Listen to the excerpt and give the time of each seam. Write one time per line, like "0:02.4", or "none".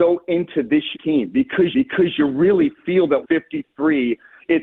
0:00.9
0:01.7
0:03.2

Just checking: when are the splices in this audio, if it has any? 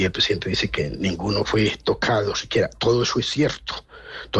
none

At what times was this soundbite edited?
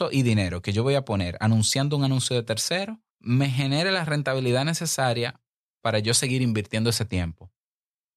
0:03.1

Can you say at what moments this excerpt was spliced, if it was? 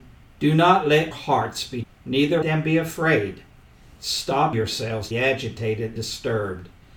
0:01.1
0:01.8
0:02.4
0:04.5
0:05.1
0:06.0

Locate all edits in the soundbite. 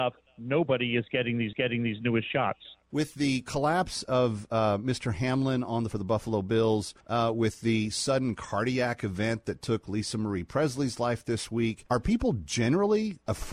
0:01.5
0:05.9
0:07.0

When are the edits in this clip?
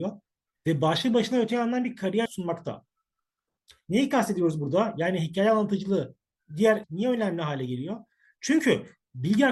0:02.3
0:06.8

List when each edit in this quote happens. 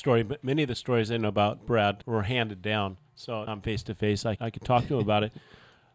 0:02.0
0:03.5
0:04.4

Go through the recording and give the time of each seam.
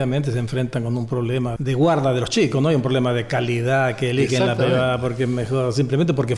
0:01.6

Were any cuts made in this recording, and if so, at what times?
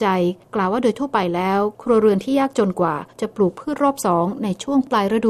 0:03.1

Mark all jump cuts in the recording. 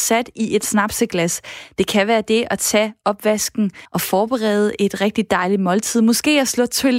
0:03.9

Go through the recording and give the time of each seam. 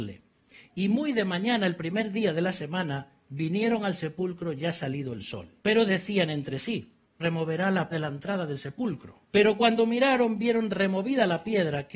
0:05.6
0:07.2
0:07.9
0:09.2

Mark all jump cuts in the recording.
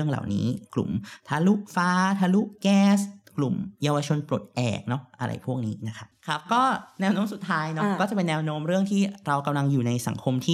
0:06.1

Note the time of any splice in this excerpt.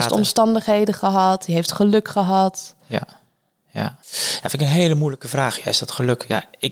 0:04.0

